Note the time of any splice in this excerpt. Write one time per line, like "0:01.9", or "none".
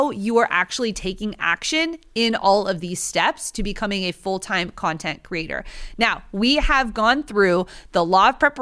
none